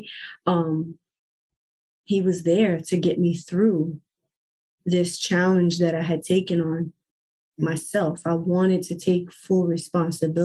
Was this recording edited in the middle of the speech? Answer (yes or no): no